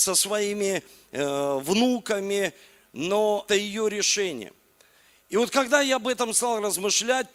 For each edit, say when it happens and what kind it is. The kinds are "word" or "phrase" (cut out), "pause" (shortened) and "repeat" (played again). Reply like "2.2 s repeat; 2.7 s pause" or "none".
3.5 s word